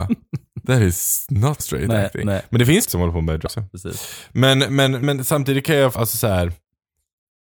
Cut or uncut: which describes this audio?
cut